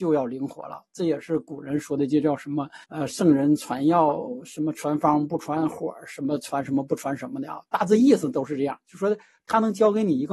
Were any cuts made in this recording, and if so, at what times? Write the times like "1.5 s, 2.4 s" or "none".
2.8 s